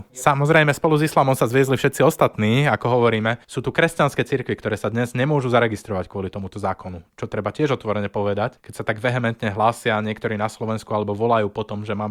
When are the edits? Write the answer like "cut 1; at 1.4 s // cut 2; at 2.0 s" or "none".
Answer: cut 1; at 3.4 s

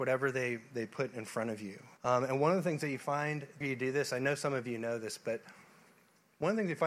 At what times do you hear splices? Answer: cut 1; at 2.0 s // cut 2; at 3.6 s

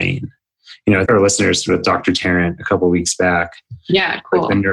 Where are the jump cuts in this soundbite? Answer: cut 1; at 1.1 s // cut 2; at 1.7 s

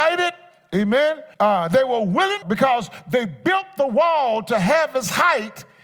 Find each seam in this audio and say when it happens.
cut 1; at 1.3 s // cut 2; at 2.4 s

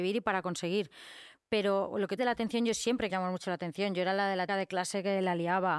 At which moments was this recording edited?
cut 1; at 2.2 s // cut 2; at 3.1 s // cut 3; at 4.5 s

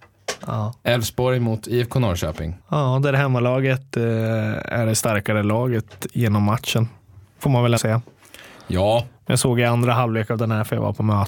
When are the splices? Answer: cut 1; at 2.6 s // cut 2; at 7.2 s // cut 3; at 7.8 s

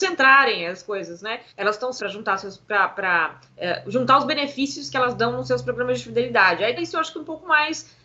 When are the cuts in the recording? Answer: cut 1; at 1.5 s // cut 2; at 2.0 s // cut 3; at 3.5 s // cut 4; at 6.8 s

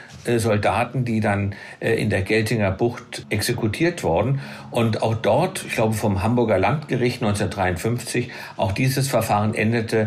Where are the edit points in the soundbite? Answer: none

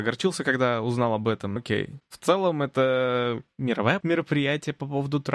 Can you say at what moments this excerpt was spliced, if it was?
cut 1; at 1.6 s // cut 2; at 4.0 s

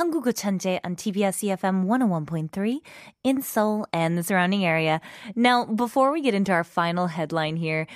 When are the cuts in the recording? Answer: none

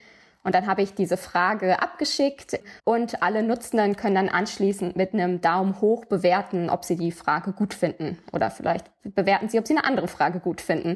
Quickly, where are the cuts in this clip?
cut 1; at 2.8 s

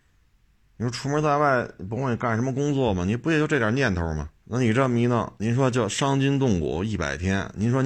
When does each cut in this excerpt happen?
cut 1; at 4.4 s // cut 2; at 5.4 s

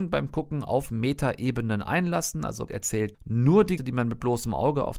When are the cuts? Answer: cut 1; at 2.7 s // cut 2; at 3.1 s // cut 3; at 3.8 s

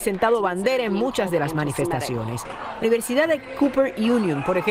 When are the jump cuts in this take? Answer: cut 1; at 2.8 s

